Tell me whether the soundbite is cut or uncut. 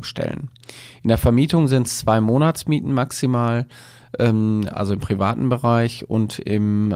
uncut